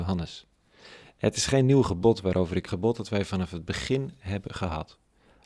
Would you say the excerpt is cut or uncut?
cut